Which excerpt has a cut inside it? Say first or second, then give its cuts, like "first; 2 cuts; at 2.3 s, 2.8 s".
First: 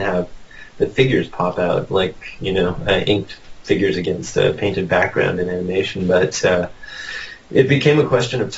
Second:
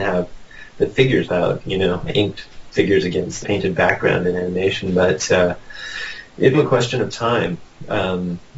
second; 5 cuts; at 1.3 s, 1.6 s, 2.1 s, 3.4 s, 6.5 s